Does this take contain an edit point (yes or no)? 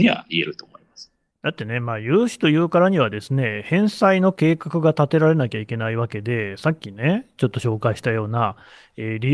no